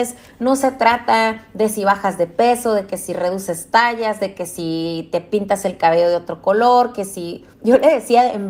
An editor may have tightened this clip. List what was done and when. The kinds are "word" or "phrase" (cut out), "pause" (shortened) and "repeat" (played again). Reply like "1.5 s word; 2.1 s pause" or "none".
7.5 s pause